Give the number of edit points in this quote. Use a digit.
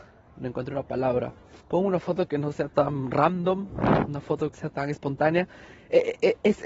2